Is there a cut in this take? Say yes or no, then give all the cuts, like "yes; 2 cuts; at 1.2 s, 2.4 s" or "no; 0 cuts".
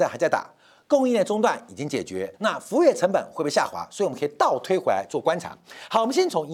yes; 1 cut; at 2.3 s